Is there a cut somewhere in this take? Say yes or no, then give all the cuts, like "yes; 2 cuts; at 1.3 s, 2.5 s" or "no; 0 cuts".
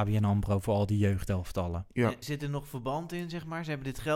yes; 1 cut; at 2.2 s